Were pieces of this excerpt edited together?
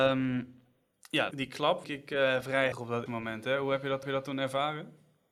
yes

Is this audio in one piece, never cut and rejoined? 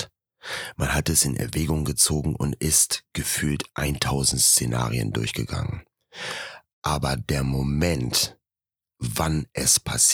yes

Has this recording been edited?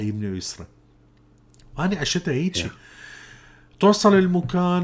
no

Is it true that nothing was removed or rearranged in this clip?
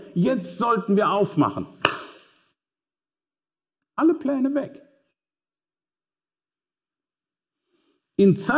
yes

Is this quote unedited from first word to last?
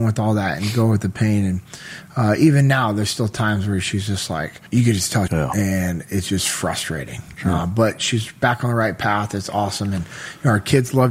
no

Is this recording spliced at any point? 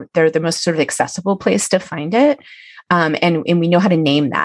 no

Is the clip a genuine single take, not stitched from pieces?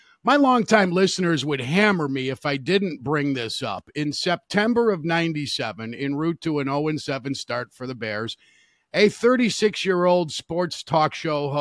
yes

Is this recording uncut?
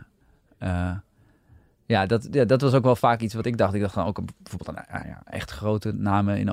yes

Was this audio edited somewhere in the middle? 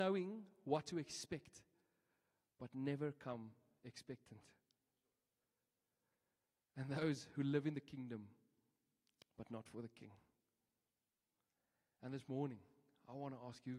no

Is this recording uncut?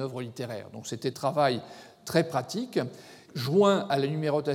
no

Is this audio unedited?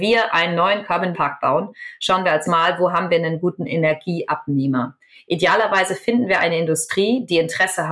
no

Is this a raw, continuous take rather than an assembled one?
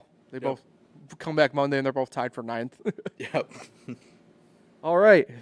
no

